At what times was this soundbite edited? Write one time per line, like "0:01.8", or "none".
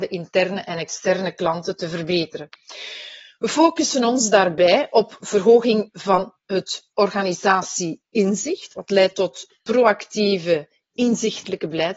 none